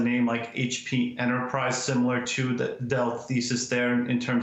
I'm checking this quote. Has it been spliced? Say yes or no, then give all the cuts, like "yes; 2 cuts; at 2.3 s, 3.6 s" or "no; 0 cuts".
no; 0 cuts